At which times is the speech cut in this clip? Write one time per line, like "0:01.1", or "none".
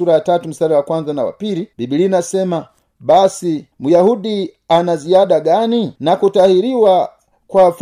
0:01.7
0:03.7
0:06.0